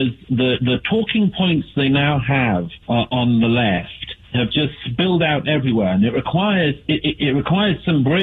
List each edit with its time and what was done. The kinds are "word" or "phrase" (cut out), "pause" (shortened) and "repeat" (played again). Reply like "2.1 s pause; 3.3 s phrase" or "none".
2.8 s pause; 4.2 s pause